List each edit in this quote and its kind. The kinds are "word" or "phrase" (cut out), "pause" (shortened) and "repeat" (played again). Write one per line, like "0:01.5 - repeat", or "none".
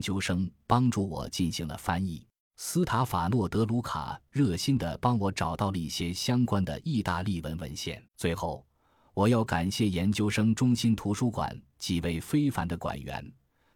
0:02.4 - pause
0:08.1 - pause